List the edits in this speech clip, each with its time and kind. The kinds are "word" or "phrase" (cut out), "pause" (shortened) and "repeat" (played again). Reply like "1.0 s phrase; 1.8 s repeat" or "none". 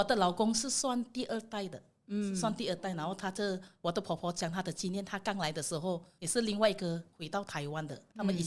none